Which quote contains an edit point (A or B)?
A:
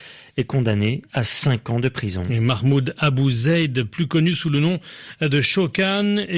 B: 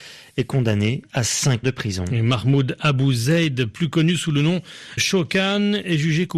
B